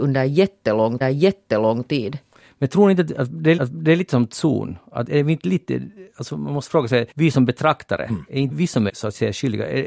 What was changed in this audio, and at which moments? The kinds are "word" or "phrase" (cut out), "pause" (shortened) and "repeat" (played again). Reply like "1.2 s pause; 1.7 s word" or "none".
1.0 s repeat; 3.6 s repeat; 7.1 s pause; 8.5 s word; 8.9 s word